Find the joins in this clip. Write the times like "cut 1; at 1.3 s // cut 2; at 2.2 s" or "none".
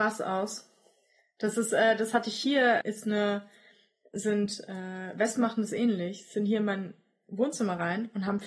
cut 1; at 2.8 s